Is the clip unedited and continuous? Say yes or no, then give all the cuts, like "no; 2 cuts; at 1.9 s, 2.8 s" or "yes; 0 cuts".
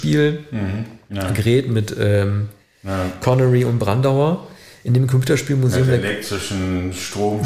yes; 0 cuts